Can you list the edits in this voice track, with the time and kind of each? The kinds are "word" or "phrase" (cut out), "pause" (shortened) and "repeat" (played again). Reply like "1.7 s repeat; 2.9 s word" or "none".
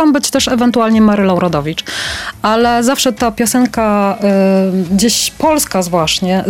none